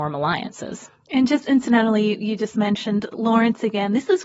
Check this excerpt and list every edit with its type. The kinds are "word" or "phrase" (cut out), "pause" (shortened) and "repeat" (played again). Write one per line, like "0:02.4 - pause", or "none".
none